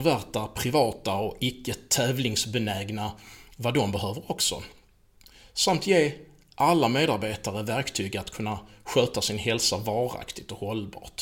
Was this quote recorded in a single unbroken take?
yes; 0 cuts

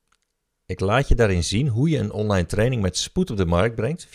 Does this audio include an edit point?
no; 0 cuts

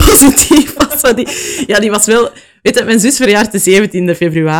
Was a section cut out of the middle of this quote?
no; 0 cuts

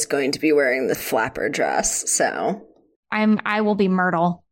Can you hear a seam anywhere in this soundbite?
yes; 1 cut; at 0.9 s

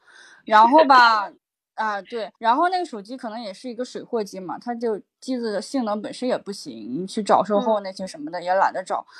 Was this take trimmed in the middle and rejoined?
yes; 2 cuts; at 1.4 s, 2.4 s

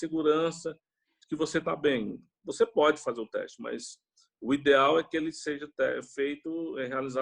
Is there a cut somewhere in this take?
no; 0 cuts

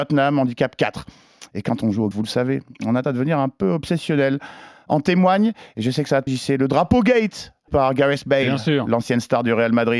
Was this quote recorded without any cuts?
no; 4 cuts; at 2.1 s, 3.0 s, 6.3 s, 7.7 s

